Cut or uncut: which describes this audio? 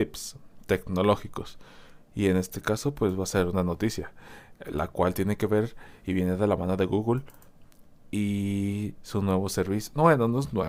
uncut